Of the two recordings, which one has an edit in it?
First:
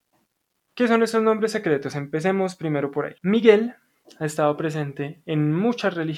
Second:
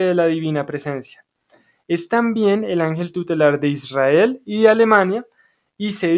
first; 1 cut; at 3.2 s

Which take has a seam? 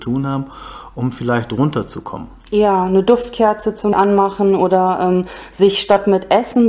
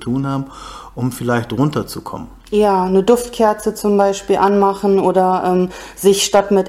first; 1 cut; at 3.9 s

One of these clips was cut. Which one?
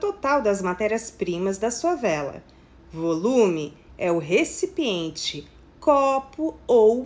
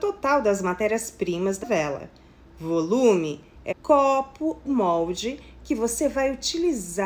second; 3 cuts; at 1.6 s, 3.7 s, 4.6 s

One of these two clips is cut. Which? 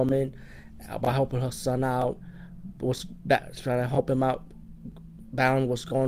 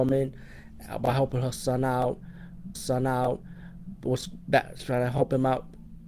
second; 1 cut; at 2.7 s

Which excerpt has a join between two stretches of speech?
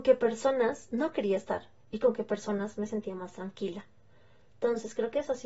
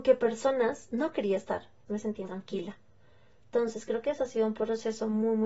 second; 2 cuts; at 1.9 s, 2.3 s

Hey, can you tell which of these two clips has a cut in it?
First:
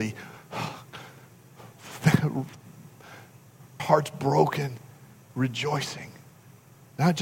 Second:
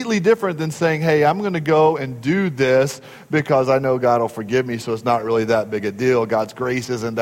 first; 1 cut; at 3.8 s

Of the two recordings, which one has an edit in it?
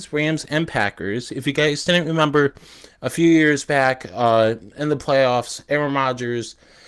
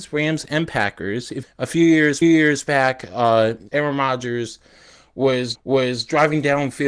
second; 4 cuts; at 1.4 s, 2.2 s, 3.7 s, 5.5 s

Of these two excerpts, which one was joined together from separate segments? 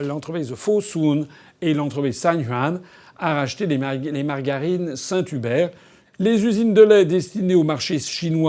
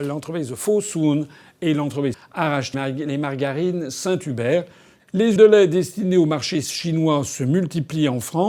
second; 3 cuts; at 2.1 s, 2.7 s, 5.4 s

